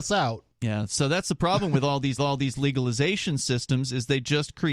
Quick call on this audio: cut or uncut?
cut